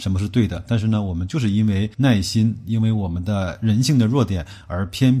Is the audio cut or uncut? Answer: cut